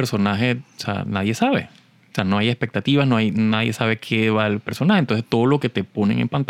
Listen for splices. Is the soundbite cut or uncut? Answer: uncut